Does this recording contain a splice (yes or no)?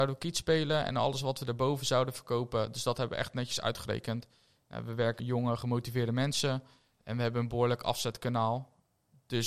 yes